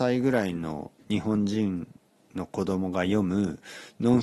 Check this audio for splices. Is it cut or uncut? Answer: uncut